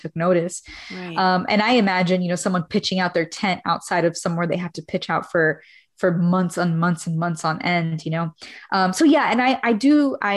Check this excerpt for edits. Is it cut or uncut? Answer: uncut